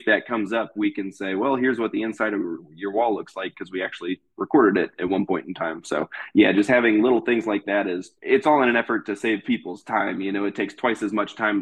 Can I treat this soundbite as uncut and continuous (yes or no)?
no